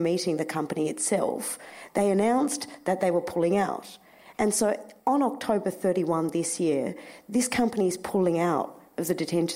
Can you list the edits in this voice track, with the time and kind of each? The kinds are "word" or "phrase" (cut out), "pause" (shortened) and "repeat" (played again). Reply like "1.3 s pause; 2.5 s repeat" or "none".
5.0 s pause